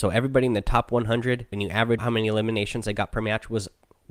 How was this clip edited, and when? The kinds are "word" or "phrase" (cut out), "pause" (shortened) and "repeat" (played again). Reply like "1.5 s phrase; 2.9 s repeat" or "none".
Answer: 1.5 s word; 2.0 s word